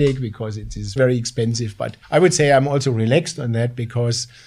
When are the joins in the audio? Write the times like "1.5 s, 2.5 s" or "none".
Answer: 1.0 s, 2.0 s